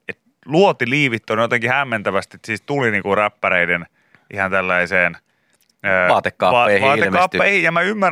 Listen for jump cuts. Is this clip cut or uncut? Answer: uncut